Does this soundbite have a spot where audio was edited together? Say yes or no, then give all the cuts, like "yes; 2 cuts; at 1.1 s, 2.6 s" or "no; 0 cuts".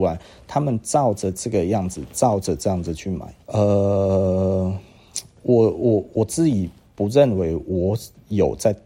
yes; 1 cut; at 3.4 s